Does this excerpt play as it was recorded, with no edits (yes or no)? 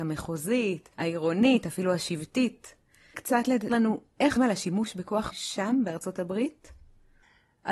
no